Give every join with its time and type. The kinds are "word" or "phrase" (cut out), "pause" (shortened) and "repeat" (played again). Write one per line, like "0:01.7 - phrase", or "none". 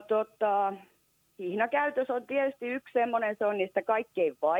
0:01.0 - pause